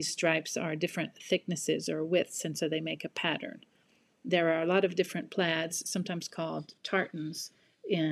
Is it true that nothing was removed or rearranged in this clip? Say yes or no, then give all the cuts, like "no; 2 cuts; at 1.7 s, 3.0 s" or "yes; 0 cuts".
yes; 0 cuts